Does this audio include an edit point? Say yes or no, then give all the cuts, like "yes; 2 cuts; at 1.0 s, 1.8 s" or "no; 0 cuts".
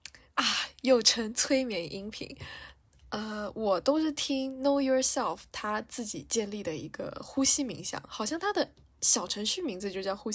no; 0 cuts